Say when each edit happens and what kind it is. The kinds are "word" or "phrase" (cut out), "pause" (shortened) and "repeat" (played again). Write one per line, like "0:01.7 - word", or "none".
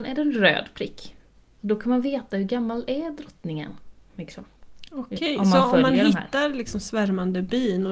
none